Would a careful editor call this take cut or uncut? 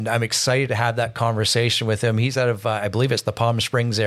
uncut